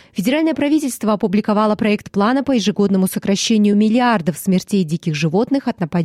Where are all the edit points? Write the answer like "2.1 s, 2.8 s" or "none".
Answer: none